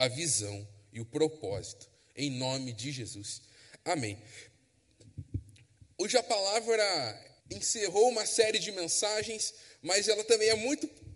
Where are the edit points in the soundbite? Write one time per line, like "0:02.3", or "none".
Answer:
0:07.4